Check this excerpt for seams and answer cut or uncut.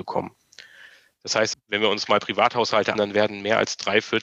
cut